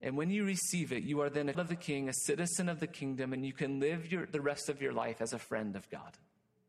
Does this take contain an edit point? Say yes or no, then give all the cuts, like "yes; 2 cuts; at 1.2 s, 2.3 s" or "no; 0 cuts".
yes; 1 cut; at 1.5 s